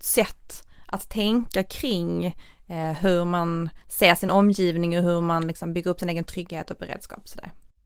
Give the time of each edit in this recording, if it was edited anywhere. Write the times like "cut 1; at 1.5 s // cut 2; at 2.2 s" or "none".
none